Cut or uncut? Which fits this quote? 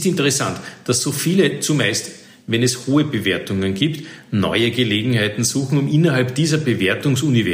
uncut